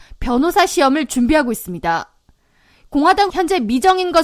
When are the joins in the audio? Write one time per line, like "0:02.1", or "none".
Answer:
0:03.3